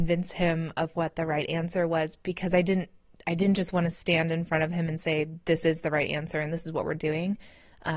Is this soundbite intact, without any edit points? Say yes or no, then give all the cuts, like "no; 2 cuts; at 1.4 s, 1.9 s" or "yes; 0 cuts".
yes; 0 cuts